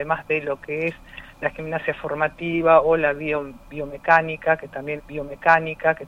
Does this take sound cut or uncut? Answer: cut